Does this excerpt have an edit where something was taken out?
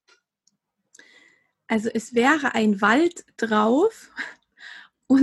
no; 0 cuts

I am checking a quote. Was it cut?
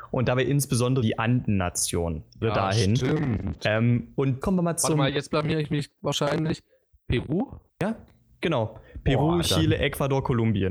yes; 5 cuts; at 1.0 s, 2.4 s, 4.4 s, 6.0 s, 7.7 s

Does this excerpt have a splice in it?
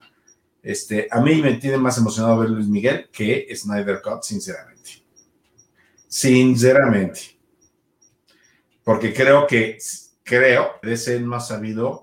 yes; 1 cut; at 10.8 s

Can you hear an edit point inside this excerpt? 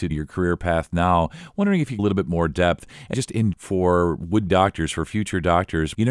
yes; 4 cuts; at 2.0 s, 3.1 s, 3.5 s, 4.5 s

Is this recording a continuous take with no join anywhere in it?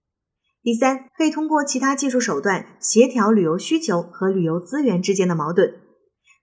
no; 1 cut; at 1.1 s

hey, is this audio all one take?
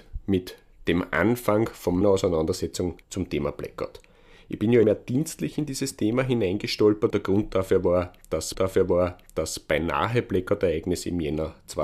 no; 5 cuts; at 2.0 s, 3.0 s, 4.8 s, 7.1 s, 8.5 s

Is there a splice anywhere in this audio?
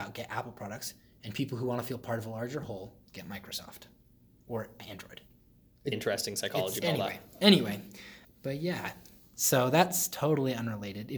yes; 3 cuts; at 5.9 s, 6.8 s, 8.2 s

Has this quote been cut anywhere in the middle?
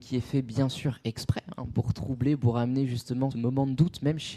yes; 2 cuts; at 1.7 s, 3.3 s

